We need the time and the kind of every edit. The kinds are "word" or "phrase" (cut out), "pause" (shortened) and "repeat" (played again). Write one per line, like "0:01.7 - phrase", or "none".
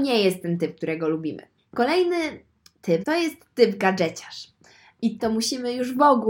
0:01.6 - pause
0:03.0 - word
0:05.2 - word